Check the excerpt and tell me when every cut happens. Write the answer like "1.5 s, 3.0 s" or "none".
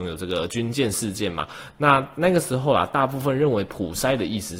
none